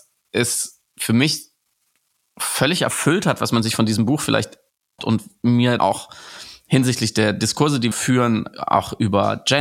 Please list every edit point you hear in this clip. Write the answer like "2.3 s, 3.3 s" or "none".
5.0 s, 5.8 s, 7.9 s